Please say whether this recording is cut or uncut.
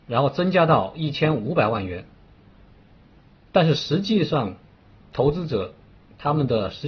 uncut